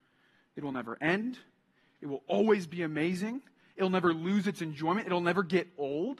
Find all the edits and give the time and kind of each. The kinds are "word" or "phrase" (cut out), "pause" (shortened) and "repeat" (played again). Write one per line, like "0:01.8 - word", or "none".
none